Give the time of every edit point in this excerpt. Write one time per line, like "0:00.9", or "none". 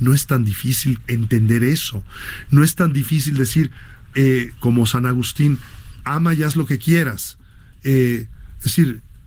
none